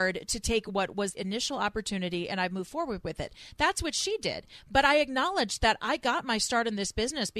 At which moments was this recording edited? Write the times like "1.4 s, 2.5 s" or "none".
1.1 s